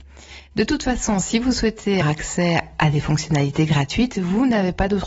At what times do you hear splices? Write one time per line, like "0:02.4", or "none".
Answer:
0:02.0